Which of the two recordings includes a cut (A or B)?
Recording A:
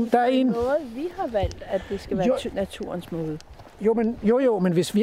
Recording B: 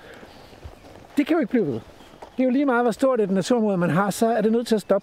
B